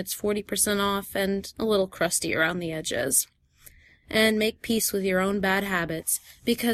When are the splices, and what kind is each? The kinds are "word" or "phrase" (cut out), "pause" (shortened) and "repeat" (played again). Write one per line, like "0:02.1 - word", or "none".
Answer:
none